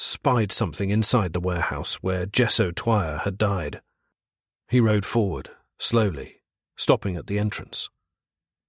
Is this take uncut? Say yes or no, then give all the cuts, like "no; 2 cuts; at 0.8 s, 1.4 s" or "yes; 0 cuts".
yes; 0 cuts